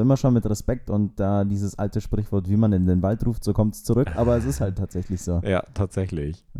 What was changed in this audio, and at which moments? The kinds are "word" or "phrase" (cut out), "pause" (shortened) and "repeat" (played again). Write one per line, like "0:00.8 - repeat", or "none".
none

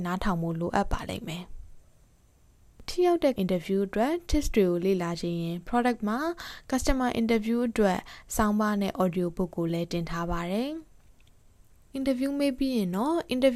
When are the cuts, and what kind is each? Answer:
0:03.4 - word
0:06.0 - word

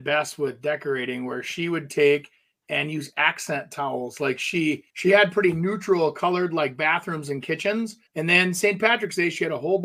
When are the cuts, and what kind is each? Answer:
0:04.9 - pause
0:08.1 - pause

